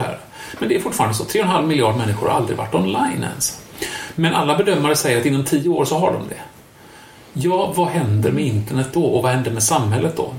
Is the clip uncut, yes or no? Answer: yes